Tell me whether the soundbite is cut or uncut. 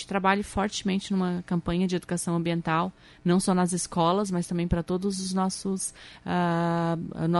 uncut